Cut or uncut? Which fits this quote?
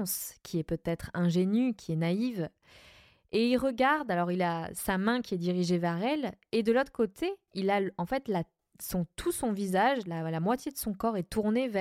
uncut